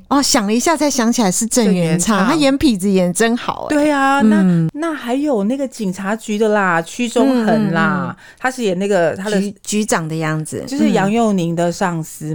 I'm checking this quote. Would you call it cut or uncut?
cut